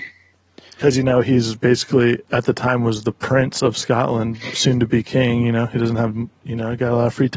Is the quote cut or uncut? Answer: uncut